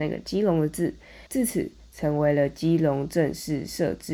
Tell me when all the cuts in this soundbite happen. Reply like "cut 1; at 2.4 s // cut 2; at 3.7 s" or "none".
cut 1; at 1.3 s